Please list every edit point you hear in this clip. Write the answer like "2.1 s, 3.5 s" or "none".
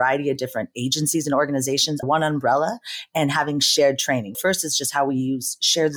2.0 s, 4.3 s